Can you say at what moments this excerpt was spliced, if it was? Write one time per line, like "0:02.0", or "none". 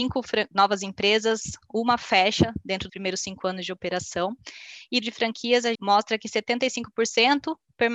0:02.9
0:05.0
0:05.7